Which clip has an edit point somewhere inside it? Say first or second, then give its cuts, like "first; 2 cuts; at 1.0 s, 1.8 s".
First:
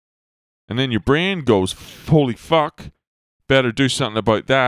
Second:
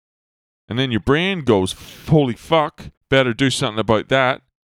second; 1 cut; at 3.0 s